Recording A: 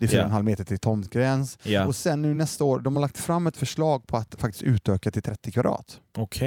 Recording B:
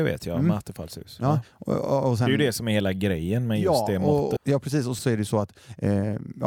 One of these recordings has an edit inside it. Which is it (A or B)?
B